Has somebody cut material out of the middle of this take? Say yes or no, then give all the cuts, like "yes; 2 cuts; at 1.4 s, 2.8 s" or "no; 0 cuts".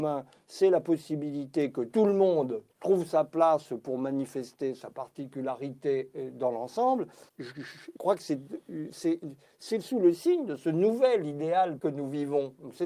yes; 4 cuts; at 2.7 s, 7.3 s, 8.0 s, 11.8 s